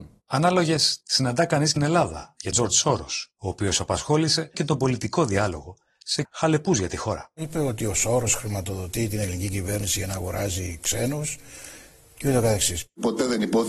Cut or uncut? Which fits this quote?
cut